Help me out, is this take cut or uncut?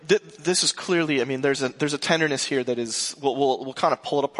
uncut